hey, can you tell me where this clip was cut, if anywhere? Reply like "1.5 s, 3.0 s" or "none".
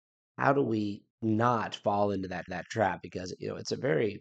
1.1 s, 2.5 s